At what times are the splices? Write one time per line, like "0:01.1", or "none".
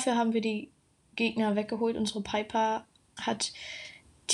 0:03.2